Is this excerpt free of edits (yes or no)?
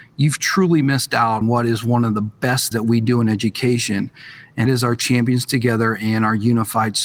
no